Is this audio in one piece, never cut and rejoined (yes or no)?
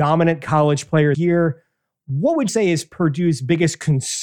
no